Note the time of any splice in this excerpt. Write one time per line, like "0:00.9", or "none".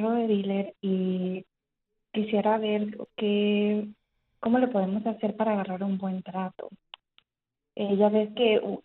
none